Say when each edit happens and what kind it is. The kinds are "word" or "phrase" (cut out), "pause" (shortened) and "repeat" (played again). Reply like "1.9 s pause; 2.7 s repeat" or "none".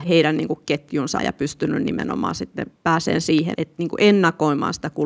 1.2 s word; 3.5 s word